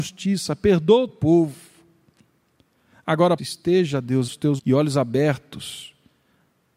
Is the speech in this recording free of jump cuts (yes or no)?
no